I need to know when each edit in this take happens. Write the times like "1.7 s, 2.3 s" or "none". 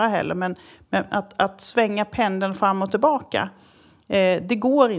none